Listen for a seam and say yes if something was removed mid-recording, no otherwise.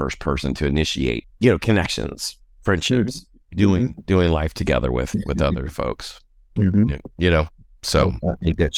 no